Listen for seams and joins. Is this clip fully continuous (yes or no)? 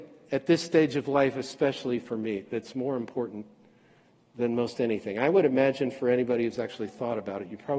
yes